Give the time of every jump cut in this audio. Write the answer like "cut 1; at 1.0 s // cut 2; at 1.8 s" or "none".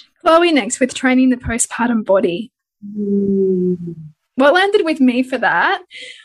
none

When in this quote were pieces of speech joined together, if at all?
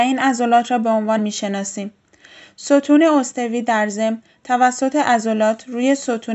cut 1; at 1.2 s

